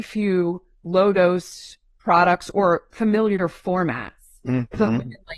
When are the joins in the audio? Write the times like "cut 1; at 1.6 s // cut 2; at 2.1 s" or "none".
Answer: none